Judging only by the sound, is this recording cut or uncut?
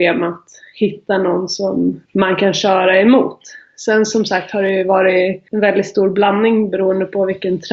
cut